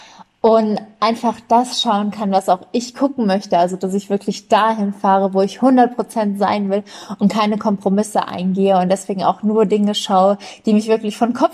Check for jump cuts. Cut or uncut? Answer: uncut